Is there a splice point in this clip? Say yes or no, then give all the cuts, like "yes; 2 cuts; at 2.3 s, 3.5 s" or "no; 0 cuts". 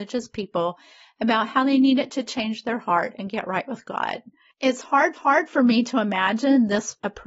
yes; 1 cut; at 5.2 s